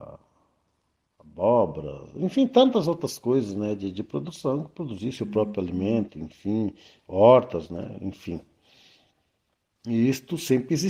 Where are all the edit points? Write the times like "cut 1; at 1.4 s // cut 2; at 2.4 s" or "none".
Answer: none